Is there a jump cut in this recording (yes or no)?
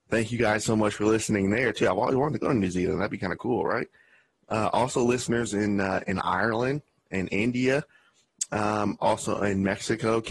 no